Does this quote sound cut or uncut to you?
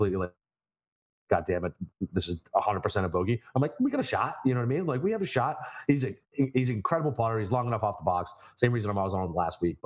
uncut